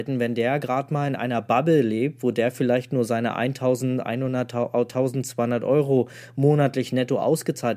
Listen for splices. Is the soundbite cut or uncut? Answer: uncut